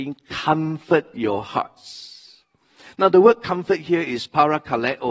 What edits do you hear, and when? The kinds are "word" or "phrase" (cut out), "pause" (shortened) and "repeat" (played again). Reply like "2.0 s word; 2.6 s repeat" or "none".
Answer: none